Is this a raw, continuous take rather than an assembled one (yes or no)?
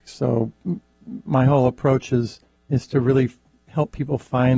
no